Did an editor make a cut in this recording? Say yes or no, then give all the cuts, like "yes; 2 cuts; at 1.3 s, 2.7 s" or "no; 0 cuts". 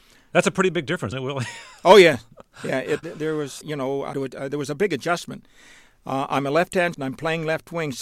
yes; 5 cuts; at 1.1 s, 3.0 s, 3.6 s, 4.1 s, 6.9 s